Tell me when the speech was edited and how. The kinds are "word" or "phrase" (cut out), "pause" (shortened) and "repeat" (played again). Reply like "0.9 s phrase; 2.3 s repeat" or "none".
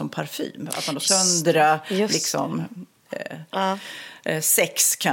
1.1 s word